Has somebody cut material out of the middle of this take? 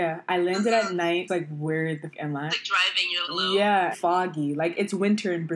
yes; 5 cuts; at 1.3 s, 2.1 s, 2.5 s, 3.2 s, 3.9 s

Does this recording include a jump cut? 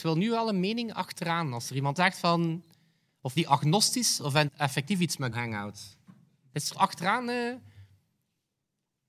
yes; 5 cuts; at 2.0 s, 3.4 s, 4.5 s, 5.3 s, 6.7 s

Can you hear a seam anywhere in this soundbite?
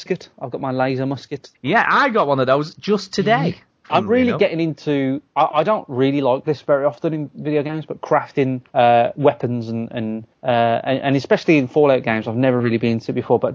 yes; 4 cuts; at 1.5 s, 5.3 s, 8.7 s, 10.3 s

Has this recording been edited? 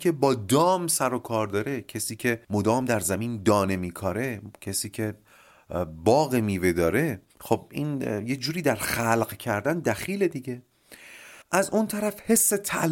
yes; 3 cuts; at 2.4 s, 7.3 s, 11.4 s

